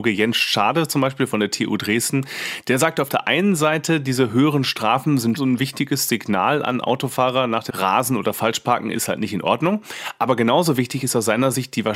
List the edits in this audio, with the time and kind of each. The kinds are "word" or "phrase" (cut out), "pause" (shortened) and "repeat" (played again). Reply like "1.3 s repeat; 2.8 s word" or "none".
5.3 s word; 7.7 s word